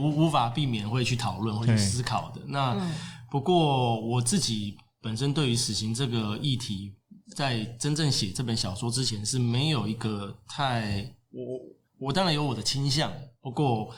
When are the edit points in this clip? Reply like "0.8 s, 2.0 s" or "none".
11.9 s